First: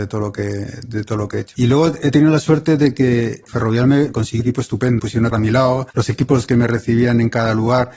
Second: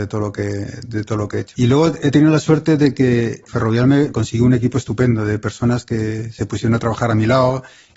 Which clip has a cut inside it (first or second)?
first